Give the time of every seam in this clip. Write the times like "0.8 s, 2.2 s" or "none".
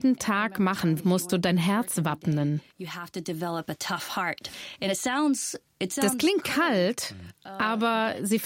1.0 s, 2.7 s